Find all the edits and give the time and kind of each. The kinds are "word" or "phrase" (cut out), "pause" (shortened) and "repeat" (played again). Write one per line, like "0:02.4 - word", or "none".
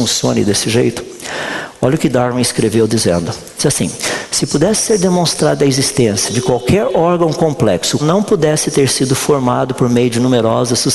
0:08.0 - word

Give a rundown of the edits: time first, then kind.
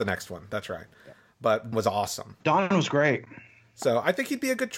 0:01.7 - word
0:02.4 - pause

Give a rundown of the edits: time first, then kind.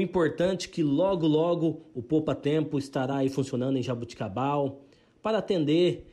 none

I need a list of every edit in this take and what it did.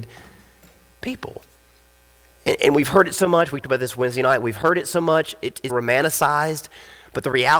0:03.6 - word
0:05.7 - word

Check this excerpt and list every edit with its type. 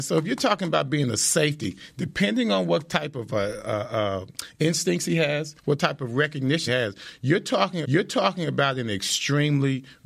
0:05.6 - pause
0:06.7 - word
0:07.8 - repeat

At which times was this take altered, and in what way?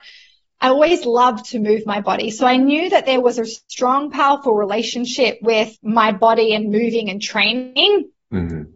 0:05.7 - pause

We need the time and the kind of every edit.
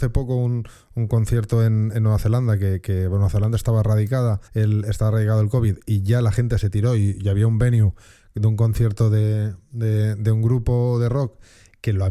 0:04.5 - pause

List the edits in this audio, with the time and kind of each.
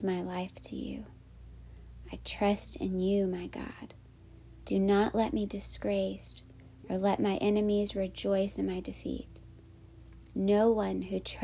0:05.5 - word

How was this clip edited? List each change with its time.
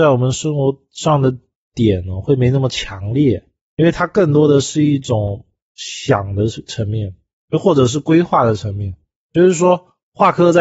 none

